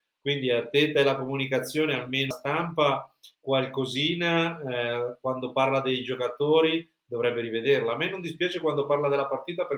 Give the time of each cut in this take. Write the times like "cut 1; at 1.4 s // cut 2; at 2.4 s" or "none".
cut 1; at 2.3 s // cut 2; at 3.3 s

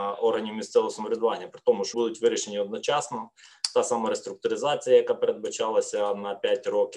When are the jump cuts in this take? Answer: cut 1; at 1.9 s

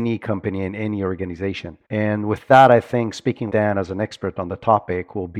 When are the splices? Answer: cut 1; at 1.8 s // cut 2; at 3.5 s

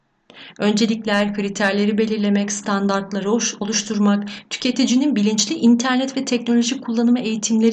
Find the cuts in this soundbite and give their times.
none

